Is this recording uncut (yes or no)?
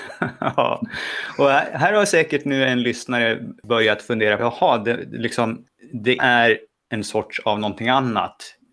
no